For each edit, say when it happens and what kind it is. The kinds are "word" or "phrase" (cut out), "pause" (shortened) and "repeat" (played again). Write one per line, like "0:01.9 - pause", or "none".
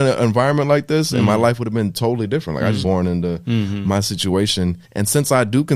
0:02.8 - phrase
0:04.8 - pause